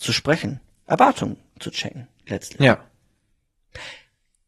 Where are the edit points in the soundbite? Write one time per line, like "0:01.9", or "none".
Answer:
none